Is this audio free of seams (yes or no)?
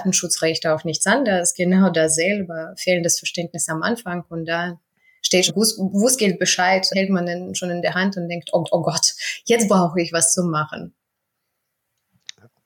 no